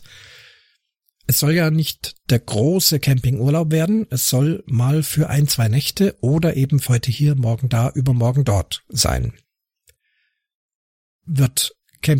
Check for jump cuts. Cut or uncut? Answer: cut